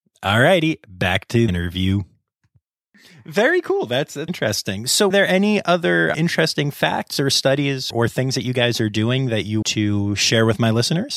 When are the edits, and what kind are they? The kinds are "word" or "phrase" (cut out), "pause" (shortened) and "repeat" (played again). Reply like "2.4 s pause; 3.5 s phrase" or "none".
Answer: 1.5 s word; 4.3 s word; 5.1 s word; 6.1 s word; 7.9 s word; 9.6 s word